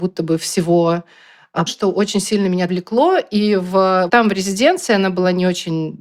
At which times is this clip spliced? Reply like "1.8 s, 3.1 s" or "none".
1.7 s, 2.7 s, 4.1 s